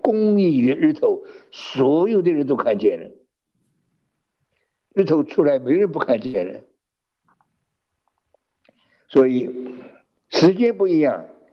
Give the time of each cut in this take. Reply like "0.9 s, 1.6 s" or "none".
none